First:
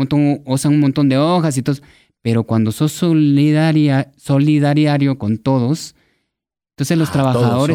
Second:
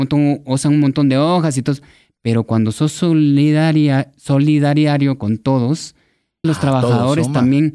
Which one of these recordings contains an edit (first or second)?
second